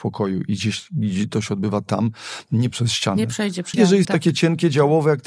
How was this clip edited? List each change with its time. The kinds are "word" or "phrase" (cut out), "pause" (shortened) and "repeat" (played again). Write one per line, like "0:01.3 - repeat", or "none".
0:01.3 - word
0:02.7 - word
0:03.7 - word
0:04.0 - phrase